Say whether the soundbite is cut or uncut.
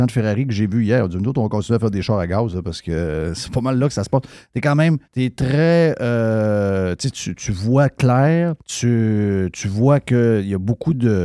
cut